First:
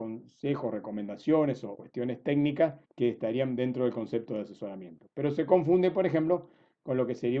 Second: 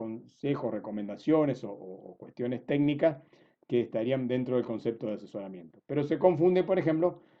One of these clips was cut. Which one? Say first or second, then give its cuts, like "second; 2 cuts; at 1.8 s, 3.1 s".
first; 2 cuts; at 1.7 s, 2.8 s